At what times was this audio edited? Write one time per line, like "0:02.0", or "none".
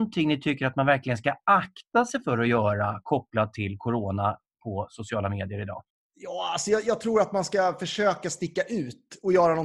0:05.9